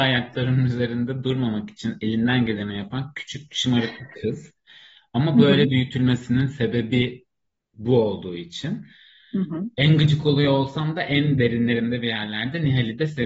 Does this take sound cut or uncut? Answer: uncut